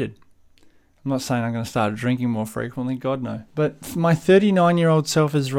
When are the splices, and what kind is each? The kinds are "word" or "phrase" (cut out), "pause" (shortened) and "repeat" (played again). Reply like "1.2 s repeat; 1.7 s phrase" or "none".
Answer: 3.5 s pause